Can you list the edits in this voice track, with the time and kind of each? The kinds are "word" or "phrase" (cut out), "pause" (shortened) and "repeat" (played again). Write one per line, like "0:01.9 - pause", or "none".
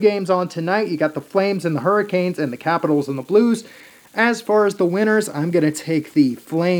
none